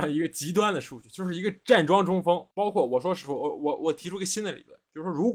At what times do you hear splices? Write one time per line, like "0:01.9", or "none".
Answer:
0:02.5